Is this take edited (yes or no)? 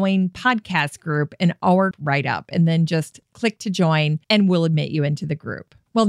yes